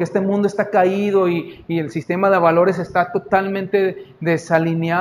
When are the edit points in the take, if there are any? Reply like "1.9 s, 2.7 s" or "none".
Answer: none